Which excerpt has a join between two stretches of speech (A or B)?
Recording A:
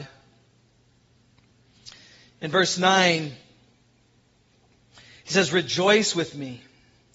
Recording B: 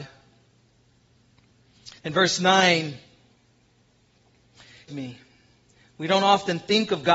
B